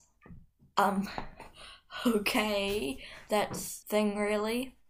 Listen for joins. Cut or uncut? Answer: cut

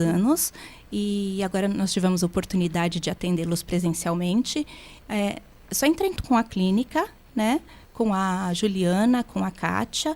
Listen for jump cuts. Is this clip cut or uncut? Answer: cut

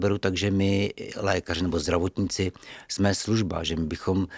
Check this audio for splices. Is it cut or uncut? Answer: uncut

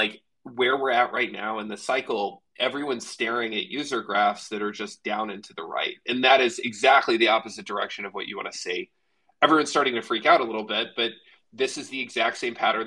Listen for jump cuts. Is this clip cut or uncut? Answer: uncut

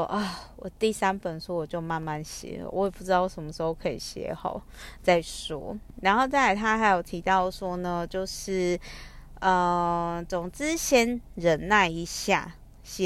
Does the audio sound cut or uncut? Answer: uncut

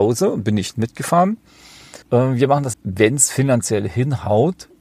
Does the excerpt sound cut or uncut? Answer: cut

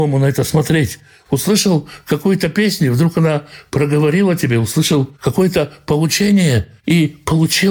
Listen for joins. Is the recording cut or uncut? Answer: cut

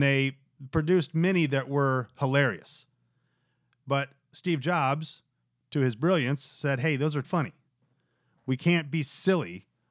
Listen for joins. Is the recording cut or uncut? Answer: cut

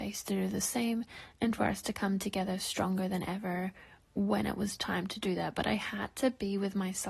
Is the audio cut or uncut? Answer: uncut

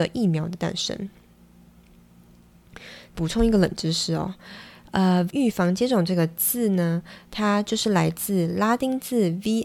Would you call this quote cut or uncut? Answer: cut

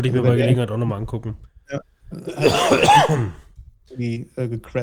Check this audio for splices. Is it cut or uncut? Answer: cut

